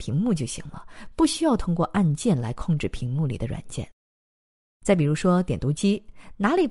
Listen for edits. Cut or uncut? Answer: uncut